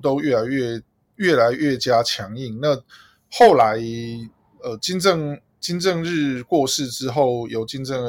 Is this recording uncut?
yes; 0 cuts

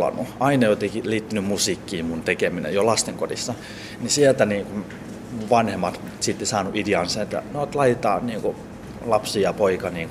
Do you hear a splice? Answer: no; 0 cuts

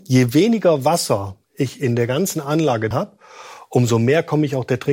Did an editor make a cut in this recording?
yes; 1 cut; at 2.9 s

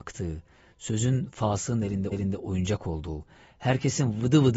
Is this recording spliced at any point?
yes; 1 cut; at 2.1 s

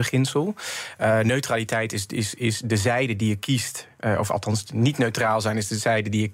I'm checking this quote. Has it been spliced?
no; 0 cuts

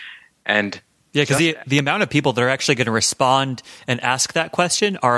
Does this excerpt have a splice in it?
no; 0 cuts

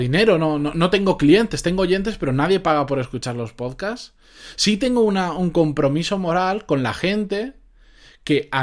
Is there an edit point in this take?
no; 0 cuts

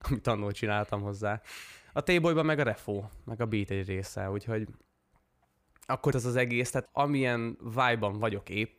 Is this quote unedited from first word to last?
no; 2 cuts; at 6.1 s, 6.9 s

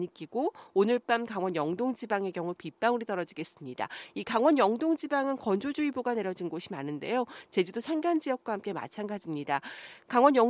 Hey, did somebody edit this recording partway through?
no; 0 cuts

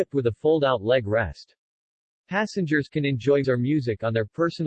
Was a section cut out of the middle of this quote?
yes; 1 cut; at 3.4 s

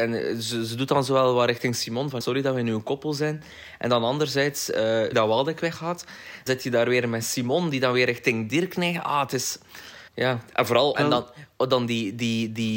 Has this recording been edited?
yes; 5 cuts; at 2.2 s, 5.1 s, 6.5 s, 10.1 s, 11.0 s

